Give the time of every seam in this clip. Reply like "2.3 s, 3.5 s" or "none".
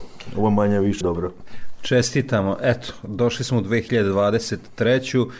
1.0 s